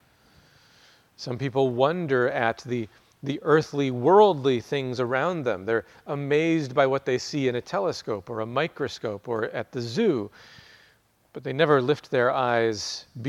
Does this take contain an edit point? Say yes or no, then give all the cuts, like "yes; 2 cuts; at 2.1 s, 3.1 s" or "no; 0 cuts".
no; 0 cuts